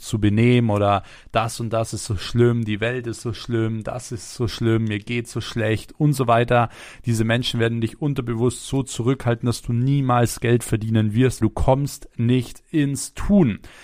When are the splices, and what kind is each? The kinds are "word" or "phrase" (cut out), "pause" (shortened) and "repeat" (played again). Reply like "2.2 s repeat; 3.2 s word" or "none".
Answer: 11.4 s word